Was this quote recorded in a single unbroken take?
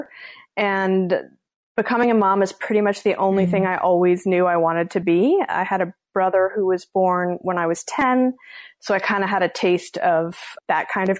yes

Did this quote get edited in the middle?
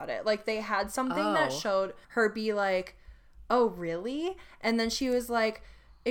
yes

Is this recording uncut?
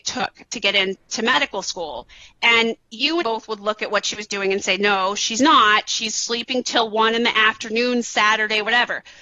no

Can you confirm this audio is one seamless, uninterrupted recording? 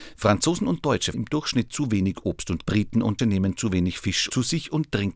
no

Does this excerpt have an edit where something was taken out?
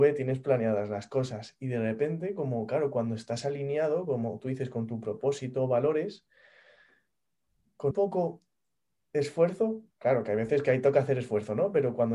yes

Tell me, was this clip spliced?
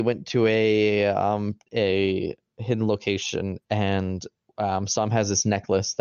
yes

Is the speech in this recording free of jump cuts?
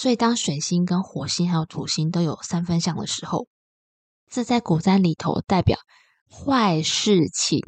yes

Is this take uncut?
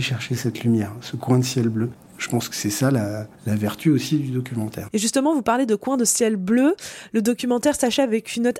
no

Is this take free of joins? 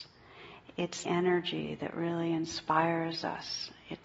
no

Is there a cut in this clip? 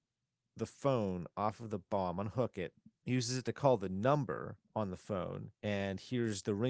yes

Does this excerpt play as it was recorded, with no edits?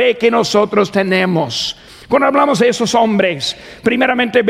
yes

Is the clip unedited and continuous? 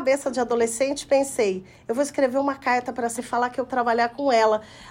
no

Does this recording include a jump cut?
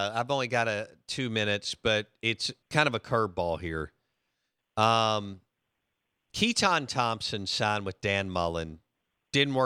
yes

